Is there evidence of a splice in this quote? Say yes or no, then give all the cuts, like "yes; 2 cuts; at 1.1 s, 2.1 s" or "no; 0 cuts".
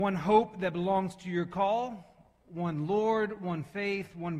no; 0 cuts